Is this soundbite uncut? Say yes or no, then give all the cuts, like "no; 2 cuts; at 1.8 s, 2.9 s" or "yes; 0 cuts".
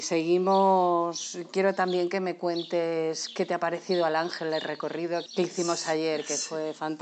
no; 1 cut; at 5.3 s